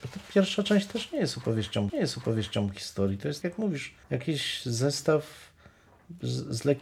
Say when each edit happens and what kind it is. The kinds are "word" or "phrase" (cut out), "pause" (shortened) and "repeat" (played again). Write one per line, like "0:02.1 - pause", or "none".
0:01.9 - repeat
0:03.4 - word
0:04.0 - pause